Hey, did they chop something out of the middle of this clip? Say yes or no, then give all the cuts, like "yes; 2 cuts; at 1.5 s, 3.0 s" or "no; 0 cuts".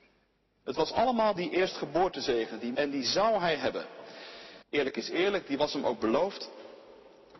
yes; 3 cuts; at 1.4 s, 2.7 s, 4.6 s